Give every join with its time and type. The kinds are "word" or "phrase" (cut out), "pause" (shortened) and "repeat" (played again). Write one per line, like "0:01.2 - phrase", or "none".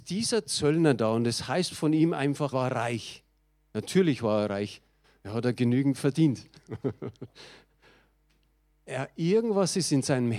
0:02.5 - word
0:08.7 - word